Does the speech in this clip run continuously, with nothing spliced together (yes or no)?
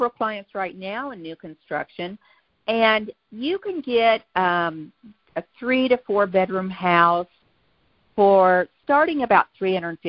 yes